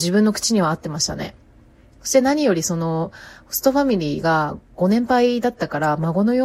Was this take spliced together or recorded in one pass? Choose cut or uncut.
uncut